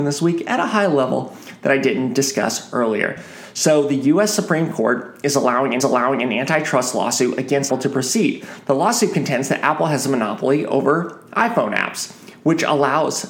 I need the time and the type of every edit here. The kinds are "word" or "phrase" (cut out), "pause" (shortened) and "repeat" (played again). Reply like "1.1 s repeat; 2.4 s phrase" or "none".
5.8 s repeat; 7.7 s word